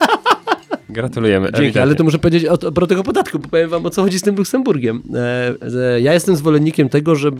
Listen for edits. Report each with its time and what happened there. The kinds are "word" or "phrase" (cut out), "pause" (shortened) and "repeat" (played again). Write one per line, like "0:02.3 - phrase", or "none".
none